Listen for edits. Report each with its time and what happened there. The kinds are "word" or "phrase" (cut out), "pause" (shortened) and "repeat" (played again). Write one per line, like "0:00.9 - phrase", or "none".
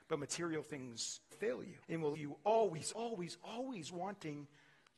0:01.3 - word
0:01.8 - pause
0:02.1 - word
0:02.9 - word